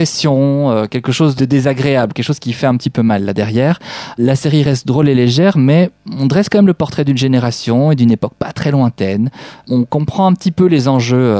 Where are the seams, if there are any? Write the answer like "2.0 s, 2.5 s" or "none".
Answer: none